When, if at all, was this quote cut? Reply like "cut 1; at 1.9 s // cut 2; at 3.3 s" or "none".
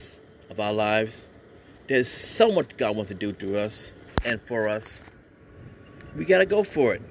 none